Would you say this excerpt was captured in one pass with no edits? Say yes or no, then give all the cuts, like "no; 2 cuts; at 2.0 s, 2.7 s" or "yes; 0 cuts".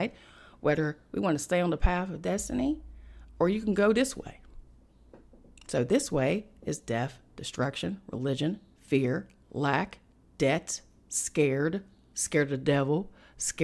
yes; 0 cuts